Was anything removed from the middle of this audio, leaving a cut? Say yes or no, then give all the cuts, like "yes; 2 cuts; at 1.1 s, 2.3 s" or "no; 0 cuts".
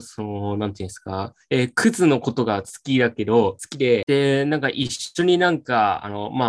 no; 0 cuts